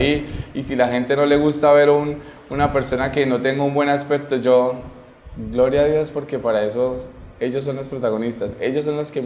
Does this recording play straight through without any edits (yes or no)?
yes